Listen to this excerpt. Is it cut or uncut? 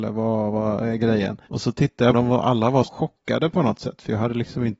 cut